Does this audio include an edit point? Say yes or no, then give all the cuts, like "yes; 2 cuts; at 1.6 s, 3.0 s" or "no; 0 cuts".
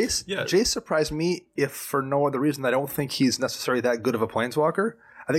no; 0 cuts